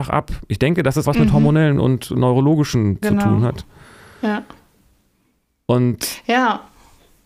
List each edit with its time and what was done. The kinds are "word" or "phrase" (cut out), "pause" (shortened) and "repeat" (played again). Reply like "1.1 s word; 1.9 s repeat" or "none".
1.0 s word; 3.0 s word